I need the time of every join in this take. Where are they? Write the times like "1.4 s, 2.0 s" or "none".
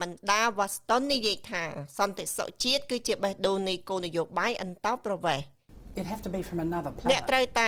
none

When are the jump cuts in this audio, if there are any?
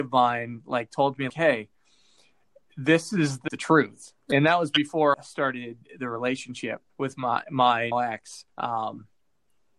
1.3 s, 3.5 s, 5.1 s, 6.9 s, 7.9 s, 8.5 s

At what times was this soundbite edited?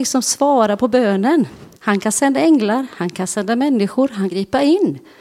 1.7 s, 4.3 s

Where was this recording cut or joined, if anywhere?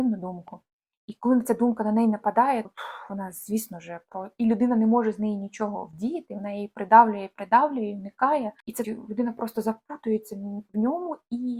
2.6 s, 8.8 s

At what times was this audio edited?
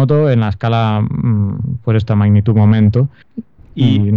none

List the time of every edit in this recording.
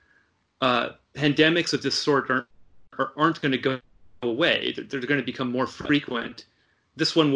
none

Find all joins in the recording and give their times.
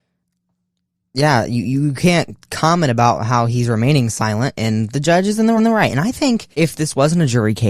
5.6 s, 6.5 s

